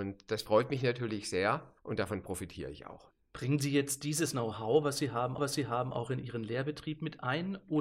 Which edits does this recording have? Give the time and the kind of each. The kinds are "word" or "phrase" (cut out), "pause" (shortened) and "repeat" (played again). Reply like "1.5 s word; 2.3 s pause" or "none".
1.8 s pause; 5.4 s repeat